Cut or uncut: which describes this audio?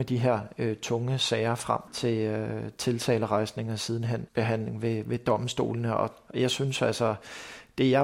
cut